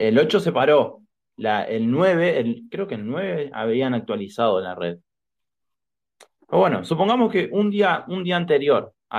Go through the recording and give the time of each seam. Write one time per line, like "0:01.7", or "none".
none